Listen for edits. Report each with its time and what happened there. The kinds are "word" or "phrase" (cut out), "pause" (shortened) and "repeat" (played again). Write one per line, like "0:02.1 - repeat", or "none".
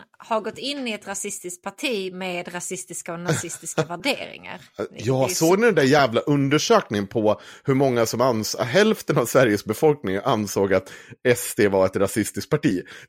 none